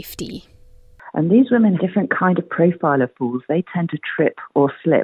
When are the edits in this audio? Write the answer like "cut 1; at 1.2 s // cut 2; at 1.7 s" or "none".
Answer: cut 1; at 1.8 s